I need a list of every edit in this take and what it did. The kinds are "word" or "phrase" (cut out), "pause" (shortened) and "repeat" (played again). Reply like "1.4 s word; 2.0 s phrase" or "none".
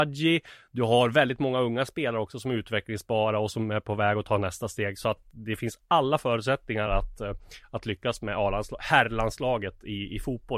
none

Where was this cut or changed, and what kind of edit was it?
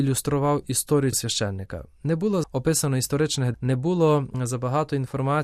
1.1 s word; 2.4 s word; 3.5 s word

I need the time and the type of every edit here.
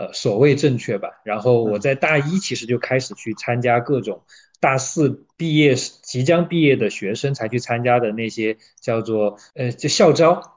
5.3 s pause

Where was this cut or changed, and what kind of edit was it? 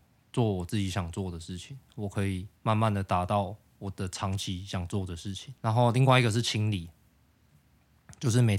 2.6 s pause; 5.6 s pause

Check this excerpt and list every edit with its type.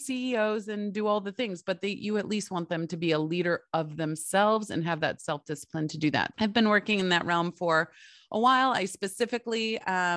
6.3 s word

